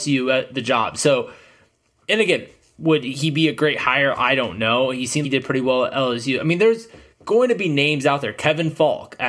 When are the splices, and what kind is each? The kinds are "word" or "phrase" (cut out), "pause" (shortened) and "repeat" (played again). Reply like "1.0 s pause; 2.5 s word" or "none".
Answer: 5.2 s word